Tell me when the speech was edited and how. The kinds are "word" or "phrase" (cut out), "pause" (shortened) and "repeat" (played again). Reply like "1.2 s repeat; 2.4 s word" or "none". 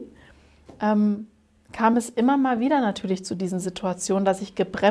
none